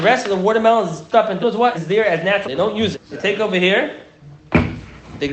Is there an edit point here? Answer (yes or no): yes